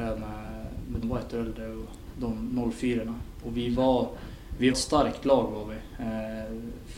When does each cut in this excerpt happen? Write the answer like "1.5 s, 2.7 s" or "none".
1.0 s, 3.4 s, 4.7 s

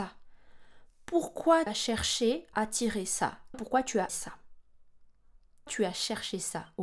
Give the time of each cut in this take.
1.7 s, 2.5 s, 3.5 s, 4.1 s, 5.7 s

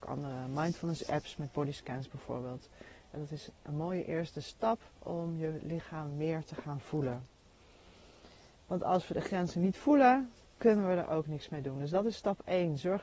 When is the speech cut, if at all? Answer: 4.9 s, 8.6 s

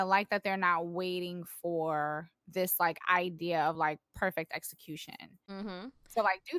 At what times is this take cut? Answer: none

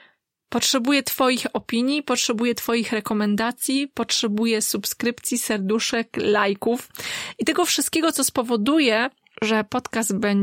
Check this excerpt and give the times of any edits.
none

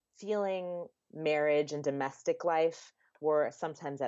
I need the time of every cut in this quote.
0.9 s

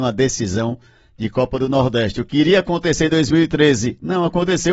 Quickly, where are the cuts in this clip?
none

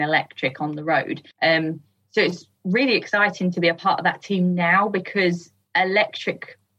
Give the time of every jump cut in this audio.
1.3 s

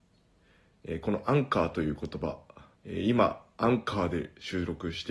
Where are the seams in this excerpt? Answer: 2.8 s

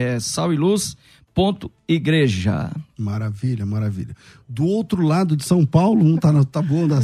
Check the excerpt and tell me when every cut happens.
none

